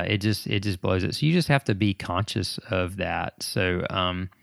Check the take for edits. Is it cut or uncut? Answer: uncut